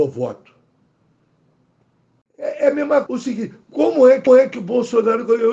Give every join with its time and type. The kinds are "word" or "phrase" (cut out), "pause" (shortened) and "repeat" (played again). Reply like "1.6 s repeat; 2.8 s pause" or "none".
3.1 s word; 4.3 s repeat